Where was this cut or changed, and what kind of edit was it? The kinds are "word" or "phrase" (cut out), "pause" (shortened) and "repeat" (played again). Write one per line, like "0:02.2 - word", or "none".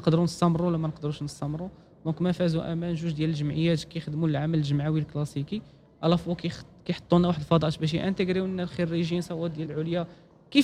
0:09.6 - word